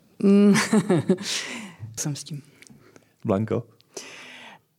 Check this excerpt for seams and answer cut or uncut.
cut